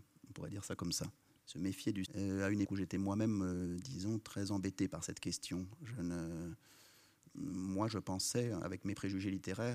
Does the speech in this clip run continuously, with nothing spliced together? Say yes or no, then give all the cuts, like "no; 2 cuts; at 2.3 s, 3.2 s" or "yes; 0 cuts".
no; 2 cuts; at 2.0 s, 2.6 s